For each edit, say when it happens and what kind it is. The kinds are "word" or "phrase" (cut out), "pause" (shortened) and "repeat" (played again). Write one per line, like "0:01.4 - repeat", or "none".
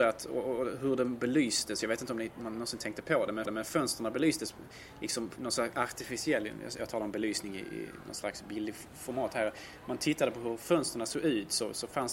0:03.5 - repeat
0:05.4 - word